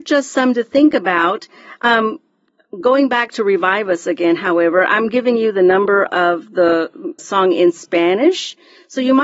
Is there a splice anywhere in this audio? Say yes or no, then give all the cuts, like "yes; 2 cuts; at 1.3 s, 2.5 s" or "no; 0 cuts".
yes; 2 cuts; at 6.1 s, 7.2 s